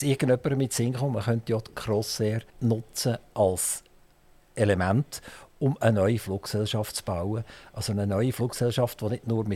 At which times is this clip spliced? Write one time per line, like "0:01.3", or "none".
0:02.5